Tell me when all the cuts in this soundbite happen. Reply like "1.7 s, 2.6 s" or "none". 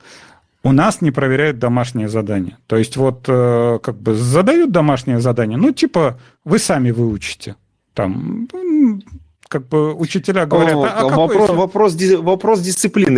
none